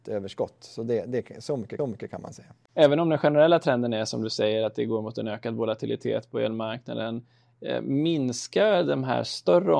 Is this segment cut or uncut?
cut